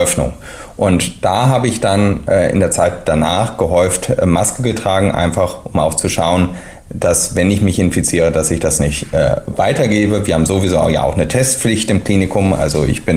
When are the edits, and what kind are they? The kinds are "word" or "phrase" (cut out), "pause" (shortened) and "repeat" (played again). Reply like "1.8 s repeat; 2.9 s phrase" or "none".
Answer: none